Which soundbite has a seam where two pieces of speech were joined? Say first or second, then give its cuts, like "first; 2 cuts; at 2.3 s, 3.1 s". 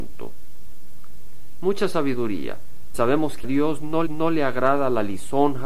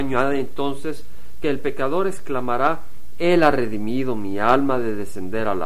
first; 3 cuts; at 2.9 s, 3.4 s, 4.1 s